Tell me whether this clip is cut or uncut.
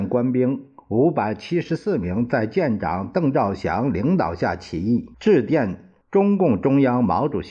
cut